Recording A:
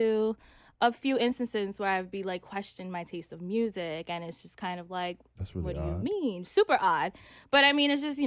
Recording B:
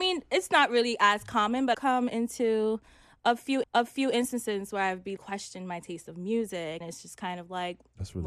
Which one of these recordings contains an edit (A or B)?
B